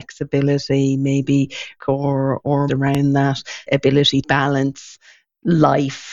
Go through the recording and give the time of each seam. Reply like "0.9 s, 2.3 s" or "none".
1.8 s, 2.7 s, 3.7 s, 4.2 s